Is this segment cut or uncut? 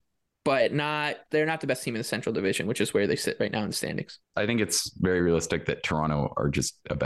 cut